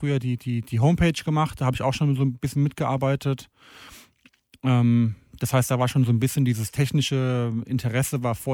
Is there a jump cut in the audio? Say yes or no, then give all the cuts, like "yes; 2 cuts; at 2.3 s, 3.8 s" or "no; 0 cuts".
no; 0 cuts